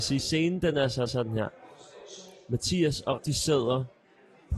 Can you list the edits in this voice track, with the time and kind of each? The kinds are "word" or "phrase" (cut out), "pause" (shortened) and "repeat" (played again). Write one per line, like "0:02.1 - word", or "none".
0:01.1 - repeat
0:03.2 - word

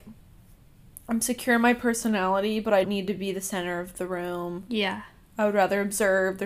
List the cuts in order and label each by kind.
0:02.8 - word

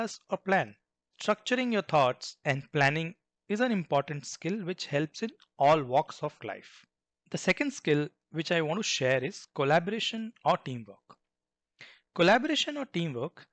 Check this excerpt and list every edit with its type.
0:06.4 - word

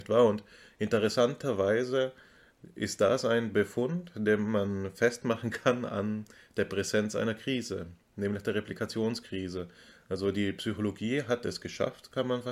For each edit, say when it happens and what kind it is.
none

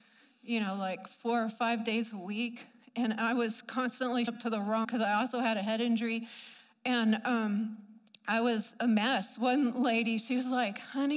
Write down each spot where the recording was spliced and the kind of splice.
0:04.3 - word
0:04.8 - word

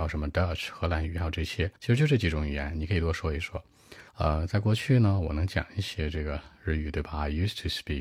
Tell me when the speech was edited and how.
0:01.8 - pause
0:04.1 - pause

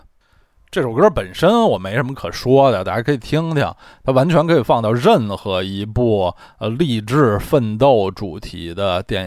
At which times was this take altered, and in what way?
none

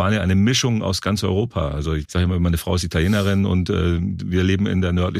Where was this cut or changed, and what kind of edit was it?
0:02.0 - word

